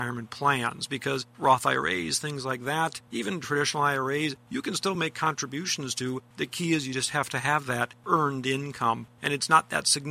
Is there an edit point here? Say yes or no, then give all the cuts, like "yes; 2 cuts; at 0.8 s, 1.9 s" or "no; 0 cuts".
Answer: no; 0 cuts